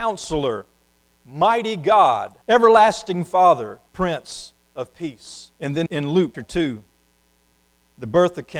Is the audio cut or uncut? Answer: cut